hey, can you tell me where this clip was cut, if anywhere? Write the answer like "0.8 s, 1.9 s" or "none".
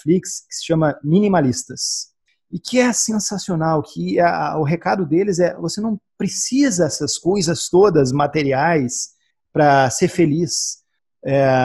none